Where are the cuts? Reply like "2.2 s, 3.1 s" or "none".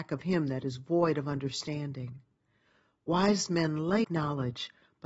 4.0 s